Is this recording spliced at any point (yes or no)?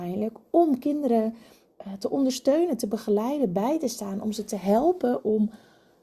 no